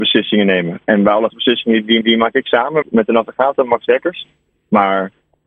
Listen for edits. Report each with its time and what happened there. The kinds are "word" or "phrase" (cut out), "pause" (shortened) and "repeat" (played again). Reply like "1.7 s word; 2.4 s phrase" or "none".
1.3 s word; 2.0 s repeat; 2.8 s word